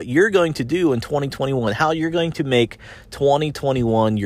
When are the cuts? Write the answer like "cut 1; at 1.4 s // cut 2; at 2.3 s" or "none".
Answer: none